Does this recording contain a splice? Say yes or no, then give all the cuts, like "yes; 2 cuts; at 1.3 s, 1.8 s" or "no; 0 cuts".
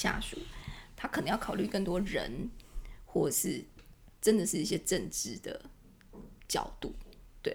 no; 0 cuts